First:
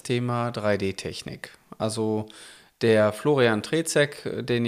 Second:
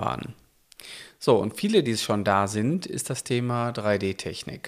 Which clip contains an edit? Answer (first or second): second